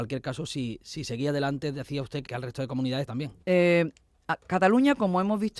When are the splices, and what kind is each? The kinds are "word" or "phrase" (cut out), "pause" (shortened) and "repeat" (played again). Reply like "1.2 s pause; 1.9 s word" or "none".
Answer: 2.2 s word; 3.1 s phrase; 3.4 s pause